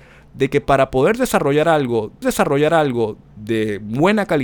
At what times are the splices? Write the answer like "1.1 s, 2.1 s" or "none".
2.2 s